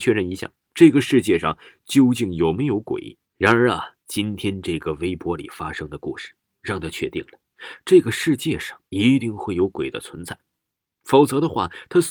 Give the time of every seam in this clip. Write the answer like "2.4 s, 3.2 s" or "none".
3.2 s, 4.0 s, 8.9 s